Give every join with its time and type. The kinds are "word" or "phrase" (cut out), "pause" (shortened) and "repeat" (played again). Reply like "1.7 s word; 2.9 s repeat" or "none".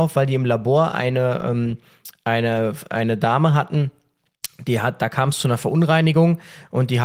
none